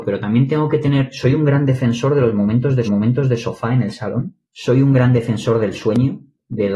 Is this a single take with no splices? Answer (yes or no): no